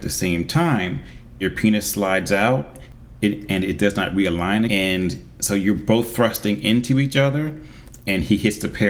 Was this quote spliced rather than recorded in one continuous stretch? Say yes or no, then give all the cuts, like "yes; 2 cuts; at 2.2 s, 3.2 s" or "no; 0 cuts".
yes; 2 cuts; at 1.4 s, 4.7 s